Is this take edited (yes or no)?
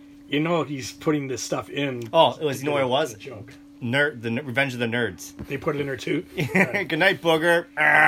no